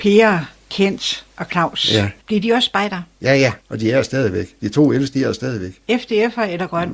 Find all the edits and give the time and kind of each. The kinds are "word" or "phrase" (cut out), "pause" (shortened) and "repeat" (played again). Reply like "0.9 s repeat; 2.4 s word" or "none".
2.2 s pause; 3.1 s pause; 3.6 s pause